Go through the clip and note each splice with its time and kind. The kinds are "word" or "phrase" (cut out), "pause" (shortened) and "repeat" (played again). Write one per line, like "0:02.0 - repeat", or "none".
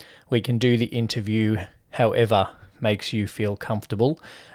none